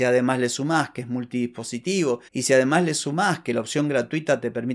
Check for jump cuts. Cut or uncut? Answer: cut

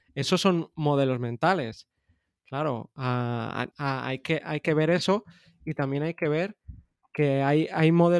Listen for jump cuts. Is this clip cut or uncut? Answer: cut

